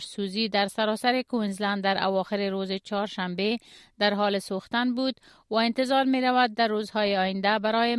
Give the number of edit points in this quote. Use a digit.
0